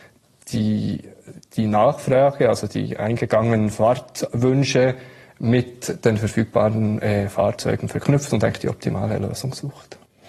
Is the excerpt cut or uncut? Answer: uncut